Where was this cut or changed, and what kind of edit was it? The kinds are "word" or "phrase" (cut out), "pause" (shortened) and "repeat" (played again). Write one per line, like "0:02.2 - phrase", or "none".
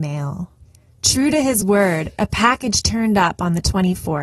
none